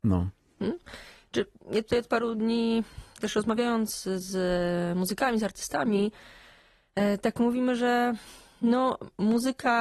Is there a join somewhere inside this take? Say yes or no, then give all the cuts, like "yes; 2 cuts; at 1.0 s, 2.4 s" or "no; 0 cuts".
no; 0 cuts